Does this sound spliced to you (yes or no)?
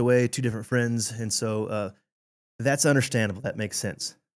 no